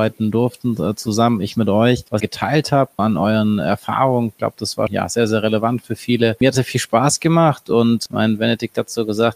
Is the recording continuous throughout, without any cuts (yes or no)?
no